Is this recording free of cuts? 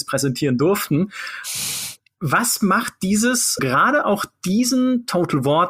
no; 1 cut; at 3.6 s

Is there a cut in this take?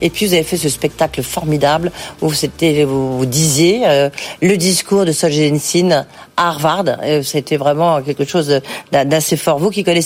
no; 0 cuts

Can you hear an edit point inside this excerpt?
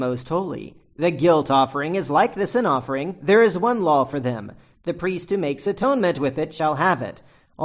no; 0 cuts

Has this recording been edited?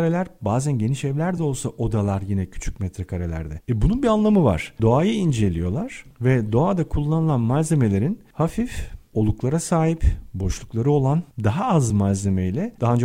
no; 0 cuts

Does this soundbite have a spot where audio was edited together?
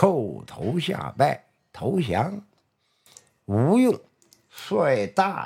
no; 0 cuts

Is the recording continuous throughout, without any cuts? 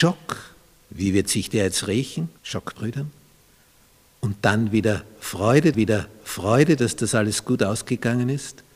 no; 3 cuts; at 2.4 s, 2.8 s, 5.7 s

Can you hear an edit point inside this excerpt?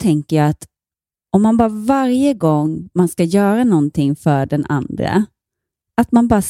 no; 0 cuts

